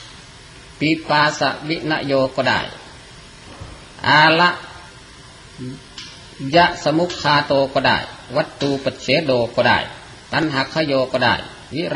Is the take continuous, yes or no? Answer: no